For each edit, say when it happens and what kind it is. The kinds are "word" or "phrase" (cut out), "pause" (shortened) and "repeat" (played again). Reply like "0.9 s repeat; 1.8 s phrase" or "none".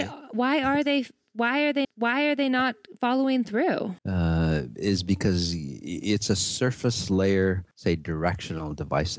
1.8 s repeat; 4.0 s pause; 7.7 s pause